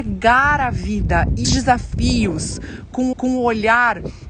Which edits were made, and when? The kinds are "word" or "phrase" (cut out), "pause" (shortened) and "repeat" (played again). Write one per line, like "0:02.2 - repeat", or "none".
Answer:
0:01.4 - word
0:03.1 - repeat